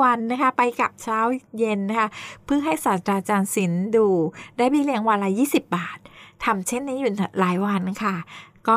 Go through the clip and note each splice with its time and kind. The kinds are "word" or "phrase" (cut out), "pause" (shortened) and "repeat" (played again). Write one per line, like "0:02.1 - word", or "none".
none